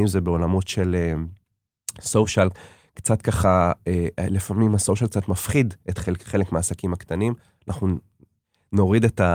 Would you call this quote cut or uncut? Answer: uncut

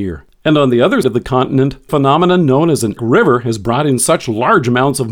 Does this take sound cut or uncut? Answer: cut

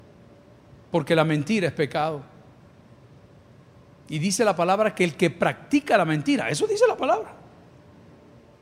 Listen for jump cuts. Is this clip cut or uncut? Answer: uncut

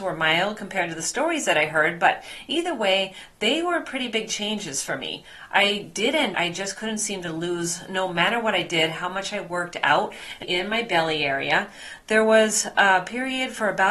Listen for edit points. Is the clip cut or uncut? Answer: cut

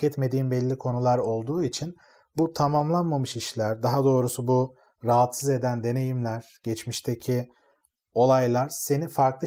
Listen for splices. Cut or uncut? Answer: uncut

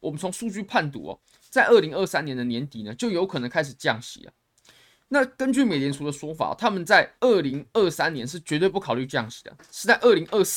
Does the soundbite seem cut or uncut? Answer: cut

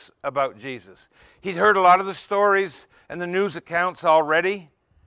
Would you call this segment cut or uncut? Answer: uncut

